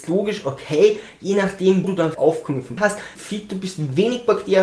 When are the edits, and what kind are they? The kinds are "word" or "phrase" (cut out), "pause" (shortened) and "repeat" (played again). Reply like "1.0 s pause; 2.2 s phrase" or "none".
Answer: 1.8 s word; 2.1 s word; 2.8 s word; 3.2 s word